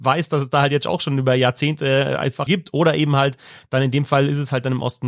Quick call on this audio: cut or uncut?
cut